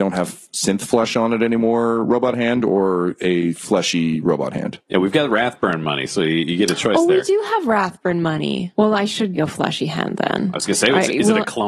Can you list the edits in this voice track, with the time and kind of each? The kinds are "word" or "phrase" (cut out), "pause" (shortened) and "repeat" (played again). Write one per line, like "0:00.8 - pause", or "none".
0:09.4 - word